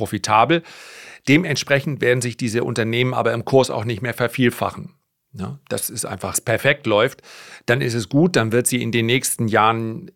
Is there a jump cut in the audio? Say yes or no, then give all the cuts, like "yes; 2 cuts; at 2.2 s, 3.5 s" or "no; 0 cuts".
yes; 1 cut; at 6.3 s